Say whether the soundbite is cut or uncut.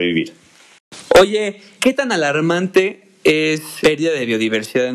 cut